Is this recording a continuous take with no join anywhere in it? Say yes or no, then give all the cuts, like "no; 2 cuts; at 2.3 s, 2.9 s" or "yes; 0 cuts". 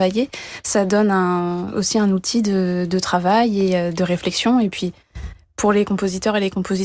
yes; 0 cuts